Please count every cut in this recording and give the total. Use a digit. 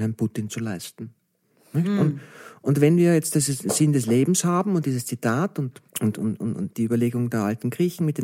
1